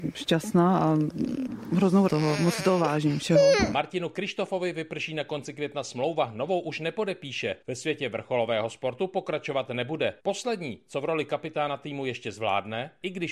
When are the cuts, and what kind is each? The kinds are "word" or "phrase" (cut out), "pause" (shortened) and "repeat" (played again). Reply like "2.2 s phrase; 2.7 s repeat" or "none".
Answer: 2.1 s word; 7.6 s pause; 10.2 s pause